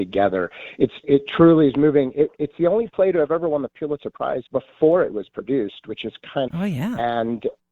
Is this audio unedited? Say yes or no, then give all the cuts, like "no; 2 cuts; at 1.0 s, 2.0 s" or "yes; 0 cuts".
no; 3 cuts; at 1.0 s, 4.5 s, 6.5 s